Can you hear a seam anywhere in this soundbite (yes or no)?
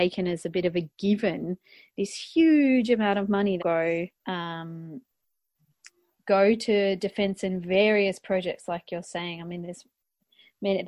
yes